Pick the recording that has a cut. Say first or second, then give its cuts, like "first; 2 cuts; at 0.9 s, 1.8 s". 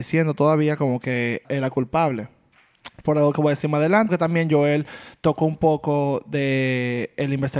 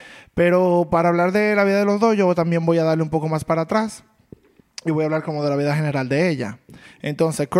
first; 2 cuts; at 1.4 s, 4.1 s